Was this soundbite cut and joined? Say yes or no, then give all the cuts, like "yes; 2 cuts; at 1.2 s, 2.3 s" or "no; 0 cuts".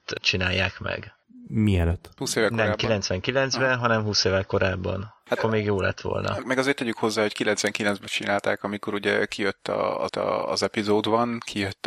yes; 3 cuts; at 5.4 s, 6.4 s, 10.1 s